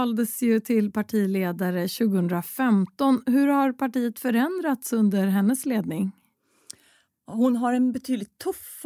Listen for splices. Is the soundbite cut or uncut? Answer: uncut